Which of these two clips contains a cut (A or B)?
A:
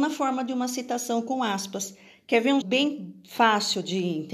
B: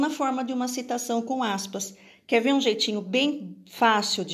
A